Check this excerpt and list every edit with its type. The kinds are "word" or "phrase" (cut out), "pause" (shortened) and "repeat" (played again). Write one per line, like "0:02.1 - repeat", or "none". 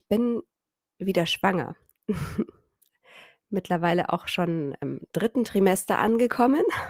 none

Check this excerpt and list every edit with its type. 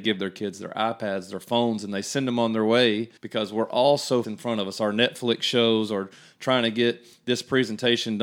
0:03.2 - pause
0:04.2 - phrase

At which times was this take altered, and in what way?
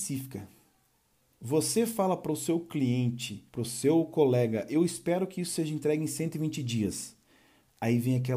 0:03.5 - pause

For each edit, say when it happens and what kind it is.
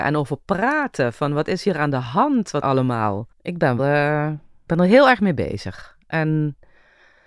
0:02.6 - phrase
0:03.3 - pause
0:03.8 - word
0:04.7 - phrase

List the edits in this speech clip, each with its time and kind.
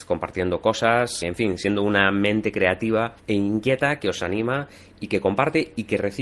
0:01.2 - word
0:03.2 - pause

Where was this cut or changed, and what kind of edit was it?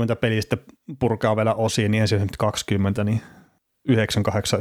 none

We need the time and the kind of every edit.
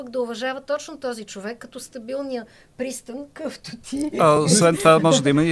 none

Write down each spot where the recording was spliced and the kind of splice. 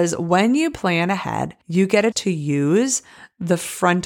0:01.6 - pause
0:02.1 - word

